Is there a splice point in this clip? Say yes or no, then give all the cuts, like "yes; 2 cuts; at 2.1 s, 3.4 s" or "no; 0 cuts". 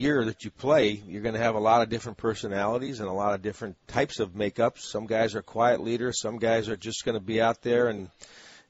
yes; 1 cut; at 3.8 s